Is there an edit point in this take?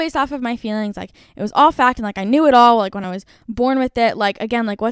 no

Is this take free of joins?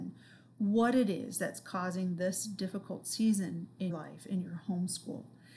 no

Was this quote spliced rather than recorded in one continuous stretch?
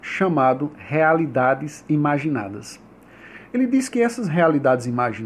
no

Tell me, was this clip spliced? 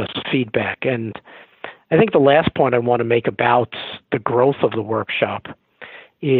no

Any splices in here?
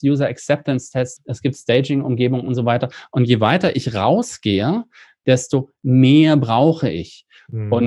no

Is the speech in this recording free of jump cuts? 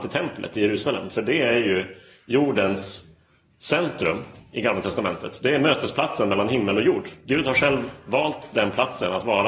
yes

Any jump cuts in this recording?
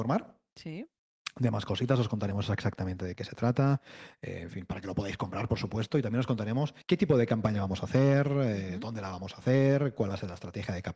yes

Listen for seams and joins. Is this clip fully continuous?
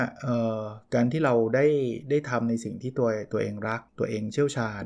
no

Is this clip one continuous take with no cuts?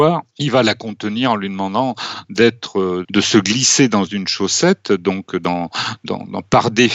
no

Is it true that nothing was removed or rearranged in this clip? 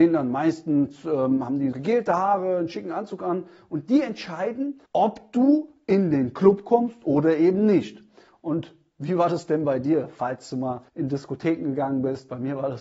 no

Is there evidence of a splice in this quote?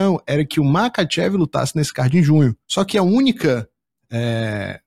yes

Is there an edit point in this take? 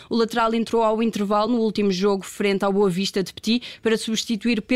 no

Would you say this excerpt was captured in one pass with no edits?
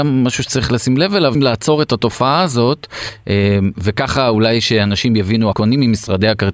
no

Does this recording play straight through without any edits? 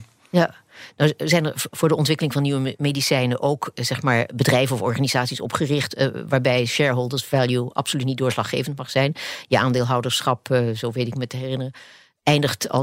no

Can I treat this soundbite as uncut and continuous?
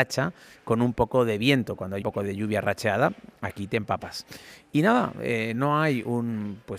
no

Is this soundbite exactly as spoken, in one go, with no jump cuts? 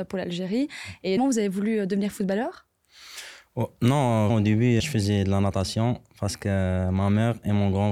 no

